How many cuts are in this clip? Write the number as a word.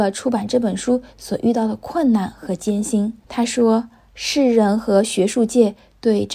one